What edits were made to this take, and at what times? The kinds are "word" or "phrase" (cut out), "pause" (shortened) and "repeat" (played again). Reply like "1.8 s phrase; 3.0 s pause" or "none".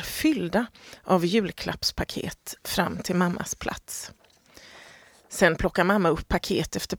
none